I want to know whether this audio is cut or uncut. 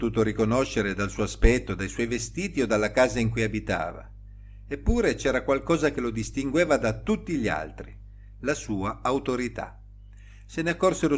uncut